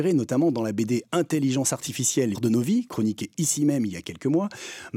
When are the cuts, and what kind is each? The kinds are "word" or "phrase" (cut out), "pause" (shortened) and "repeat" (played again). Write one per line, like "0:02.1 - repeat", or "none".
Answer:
0:02.3 - word